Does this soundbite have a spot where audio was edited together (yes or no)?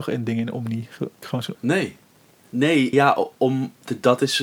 yes